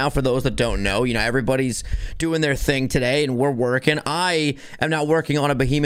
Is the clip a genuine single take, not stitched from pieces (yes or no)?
yes